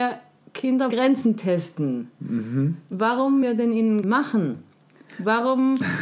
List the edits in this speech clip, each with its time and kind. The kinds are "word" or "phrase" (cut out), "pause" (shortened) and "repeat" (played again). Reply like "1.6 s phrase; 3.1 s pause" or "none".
0.9 s word; 3.4 s word; 4.0 s word